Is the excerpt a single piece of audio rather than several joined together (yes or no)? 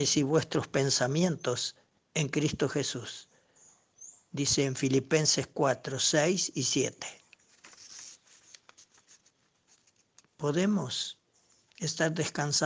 yes